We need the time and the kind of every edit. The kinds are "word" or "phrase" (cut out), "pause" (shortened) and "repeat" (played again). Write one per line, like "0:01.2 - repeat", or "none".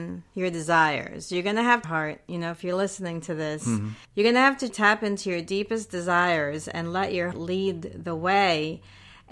0:01.8 - phrase
0:04.0 - pause
0:04.7 - word
0:07.3 - word